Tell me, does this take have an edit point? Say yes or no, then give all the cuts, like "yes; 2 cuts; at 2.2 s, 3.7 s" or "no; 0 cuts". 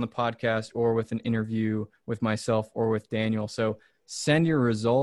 yes; 1 cut; at 3.9 s